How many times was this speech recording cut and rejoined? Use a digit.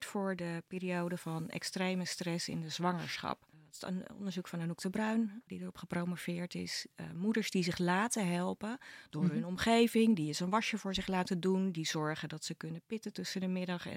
2